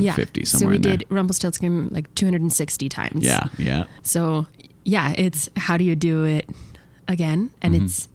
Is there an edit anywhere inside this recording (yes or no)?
no